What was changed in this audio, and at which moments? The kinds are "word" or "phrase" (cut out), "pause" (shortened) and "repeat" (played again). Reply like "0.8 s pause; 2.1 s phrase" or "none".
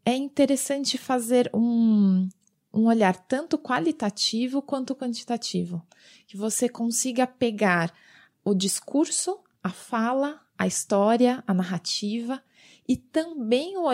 none